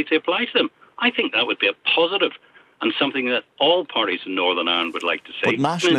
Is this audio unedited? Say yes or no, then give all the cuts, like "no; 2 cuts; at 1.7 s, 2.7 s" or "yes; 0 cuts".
yes; 0 cuts